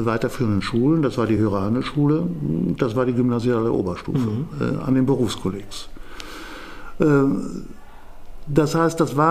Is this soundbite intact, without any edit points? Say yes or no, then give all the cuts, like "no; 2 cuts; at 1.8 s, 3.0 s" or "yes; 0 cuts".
yes; 0 cuts